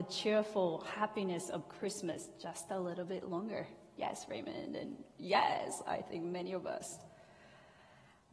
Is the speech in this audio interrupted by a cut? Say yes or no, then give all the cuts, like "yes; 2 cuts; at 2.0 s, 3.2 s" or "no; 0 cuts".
no; 0 cuts